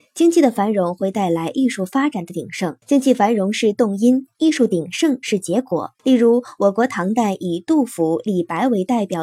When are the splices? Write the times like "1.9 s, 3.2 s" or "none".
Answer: 2.8 s, 6.0 s